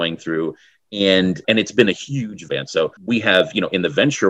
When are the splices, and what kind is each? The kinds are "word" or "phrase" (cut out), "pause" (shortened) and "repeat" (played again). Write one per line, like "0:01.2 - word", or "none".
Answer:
0:01.4 - word
0:02.5 - word
0:03.0 - pause